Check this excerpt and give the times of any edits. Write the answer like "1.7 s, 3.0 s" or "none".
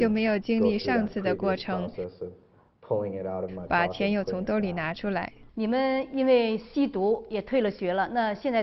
5.5 s